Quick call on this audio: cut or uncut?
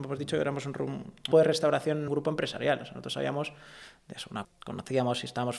cut